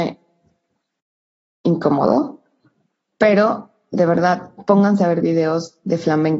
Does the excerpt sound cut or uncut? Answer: uncut